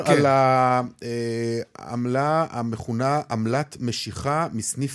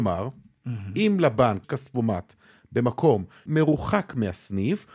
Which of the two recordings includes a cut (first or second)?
second